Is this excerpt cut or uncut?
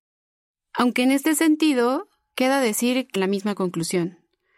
cut